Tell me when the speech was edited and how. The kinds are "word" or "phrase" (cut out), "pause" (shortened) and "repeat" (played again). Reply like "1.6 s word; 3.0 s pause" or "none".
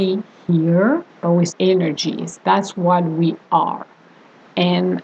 1.1 s pause; 1.5 s phrase